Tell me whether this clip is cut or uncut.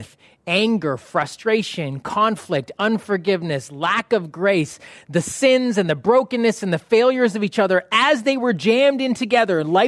uncut